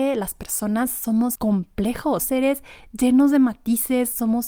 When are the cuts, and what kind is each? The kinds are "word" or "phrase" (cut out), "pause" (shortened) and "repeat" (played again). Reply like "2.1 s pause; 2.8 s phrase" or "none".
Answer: 1.4 s word; 2.2 s word